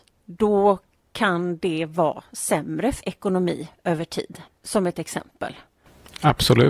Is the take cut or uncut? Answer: cut